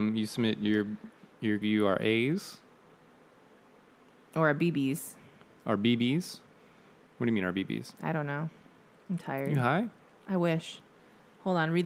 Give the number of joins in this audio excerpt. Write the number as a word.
one